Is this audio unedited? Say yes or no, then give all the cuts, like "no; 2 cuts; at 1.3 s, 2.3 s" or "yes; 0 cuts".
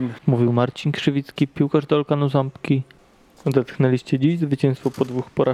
yes; 0 cuts